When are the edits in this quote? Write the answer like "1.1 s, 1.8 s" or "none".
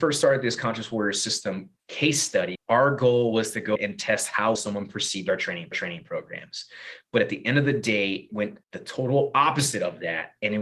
1.8 s, 2.6 s, 3.8 s, 4.6 s, 5.7 s, 8.3 s, 8.6 s